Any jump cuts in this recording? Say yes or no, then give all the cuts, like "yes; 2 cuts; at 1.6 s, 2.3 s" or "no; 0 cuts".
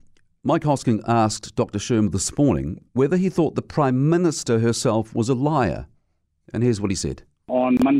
no; 0 cuts